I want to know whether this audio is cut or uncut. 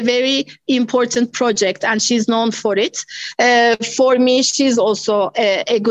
uncut